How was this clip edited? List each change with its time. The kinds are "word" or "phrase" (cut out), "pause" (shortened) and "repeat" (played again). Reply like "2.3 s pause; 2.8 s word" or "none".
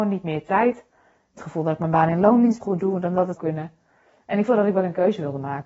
1.4 s word; 2.6 s word; 3.4 s word; 4.5 s word